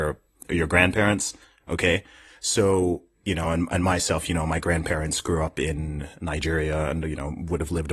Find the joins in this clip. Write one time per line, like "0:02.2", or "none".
none